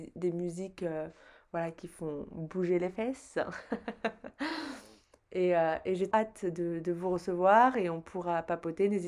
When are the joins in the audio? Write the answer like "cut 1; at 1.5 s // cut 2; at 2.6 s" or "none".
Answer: cut 1; at 6.1 s